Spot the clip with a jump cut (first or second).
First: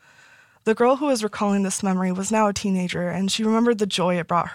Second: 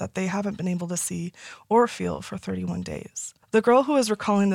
second